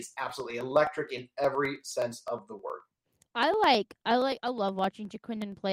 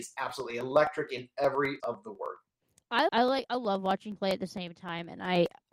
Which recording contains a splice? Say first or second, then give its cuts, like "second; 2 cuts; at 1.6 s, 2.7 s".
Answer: second; 3 cuts; at 1.8 s, 3.1 s, 4.2 s